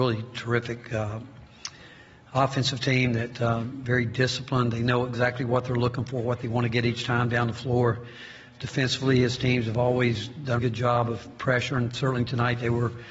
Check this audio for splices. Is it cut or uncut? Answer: cut